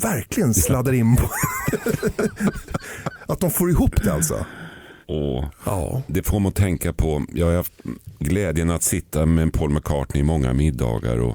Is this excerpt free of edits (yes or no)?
no